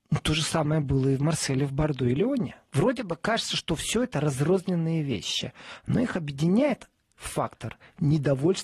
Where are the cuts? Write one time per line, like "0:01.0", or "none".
0:07.1